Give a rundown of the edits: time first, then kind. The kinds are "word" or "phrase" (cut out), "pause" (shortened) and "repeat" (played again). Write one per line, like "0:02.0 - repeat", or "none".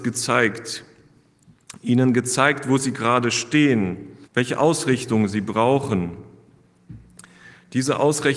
0:04.2 - pause